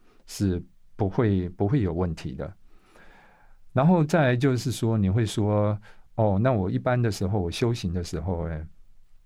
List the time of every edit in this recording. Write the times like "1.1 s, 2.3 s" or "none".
6.1 s